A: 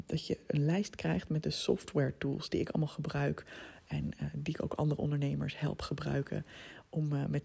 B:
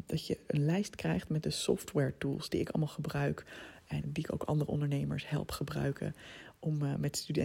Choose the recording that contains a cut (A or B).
B